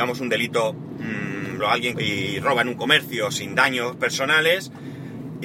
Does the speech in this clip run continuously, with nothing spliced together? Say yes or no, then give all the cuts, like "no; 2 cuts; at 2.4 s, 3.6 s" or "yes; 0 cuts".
no; 2 cuts; at 1.6 s, 1.9 s